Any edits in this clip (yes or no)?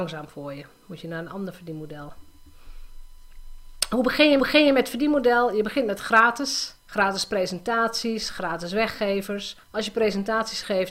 yes